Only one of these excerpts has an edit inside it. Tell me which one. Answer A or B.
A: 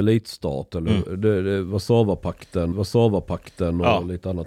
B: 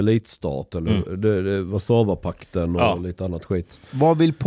A